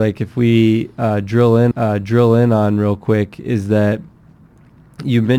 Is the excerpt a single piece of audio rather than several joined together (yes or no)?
no